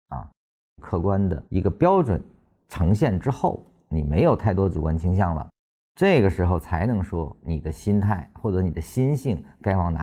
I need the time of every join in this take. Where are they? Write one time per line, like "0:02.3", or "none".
0:01.5